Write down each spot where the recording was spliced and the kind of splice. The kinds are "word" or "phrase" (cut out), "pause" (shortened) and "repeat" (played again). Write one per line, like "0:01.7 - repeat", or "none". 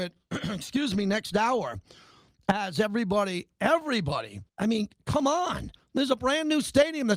0:04.5 - pause